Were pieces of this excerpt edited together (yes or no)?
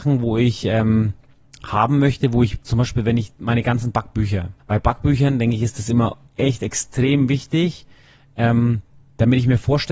yes